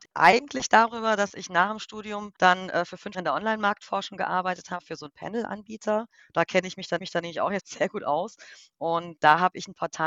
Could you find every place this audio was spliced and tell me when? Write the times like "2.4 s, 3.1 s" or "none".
2.4 s, 3.1 s, 6.2 s, 7.0 s, 7.6 s